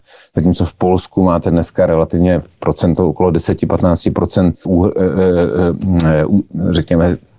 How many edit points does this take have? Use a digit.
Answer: 1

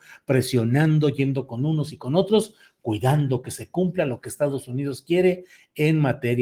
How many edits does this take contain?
1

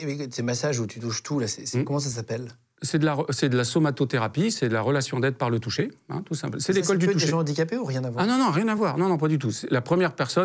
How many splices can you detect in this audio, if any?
0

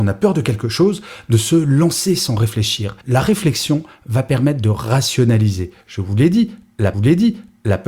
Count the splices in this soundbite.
3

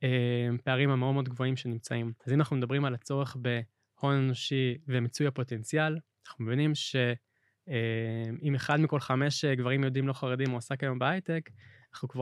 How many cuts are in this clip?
1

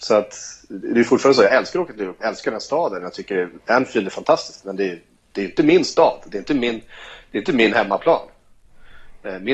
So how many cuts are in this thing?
1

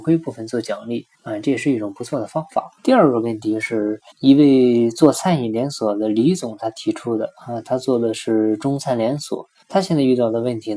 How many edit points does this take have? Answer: 4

